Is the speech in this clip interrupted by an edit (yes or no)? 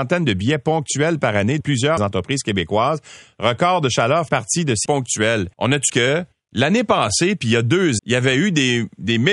yes